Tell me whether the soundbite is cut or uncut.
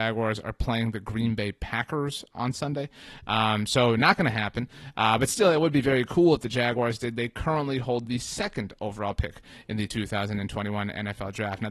uncut